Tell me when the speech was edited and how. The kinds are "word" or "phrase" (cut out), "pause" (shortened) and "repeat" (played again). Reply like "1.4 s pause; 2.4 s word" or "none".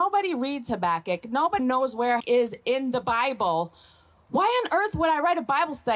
1.6 s word; 2.2 s word